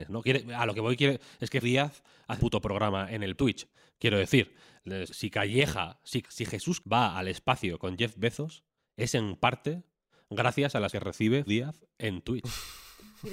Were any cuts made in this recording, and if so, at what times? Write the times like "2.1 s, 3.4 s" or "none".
1.6 s, 2.4 s, 3.4 s, 5.1 s, 6.2 s, 6.8 s, 10.9 s, 11.5 s